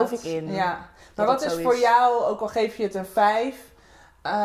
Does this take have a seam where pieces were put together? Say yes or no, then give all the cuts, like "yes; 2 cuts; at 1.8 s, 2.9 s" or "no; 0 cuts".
no; 0 cuts